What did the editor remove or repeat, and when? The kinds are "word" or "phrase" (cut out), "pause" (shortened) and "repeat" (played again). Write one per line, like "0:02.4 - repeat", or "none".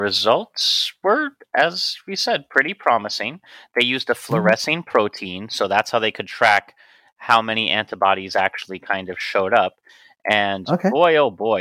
none